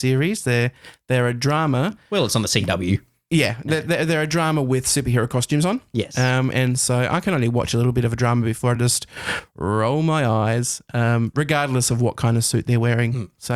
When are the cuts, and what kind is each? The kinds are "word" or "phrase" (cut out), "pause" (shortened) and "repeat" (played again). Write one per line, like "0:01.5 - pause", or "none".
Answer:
none